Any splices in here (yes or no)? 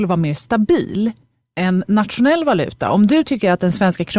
no